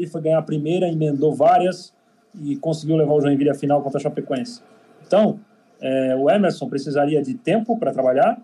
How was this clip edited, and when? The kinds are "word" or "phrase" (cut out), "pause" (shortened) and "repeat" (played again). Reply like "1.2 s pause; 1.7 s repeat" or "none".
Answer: none